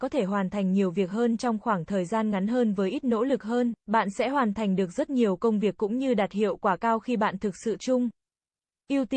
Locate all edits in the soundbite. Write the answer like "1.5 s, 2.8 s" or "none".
3.8 s, 7.8 s